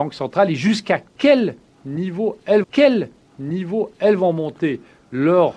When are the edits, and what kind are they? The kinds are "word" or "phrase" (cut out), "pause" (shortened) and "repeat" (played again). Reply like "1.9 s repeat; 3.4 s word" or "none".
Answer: 2.6 s repeat